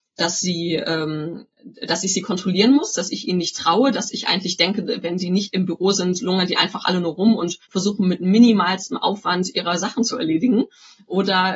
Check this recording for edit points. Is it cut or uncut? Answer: cut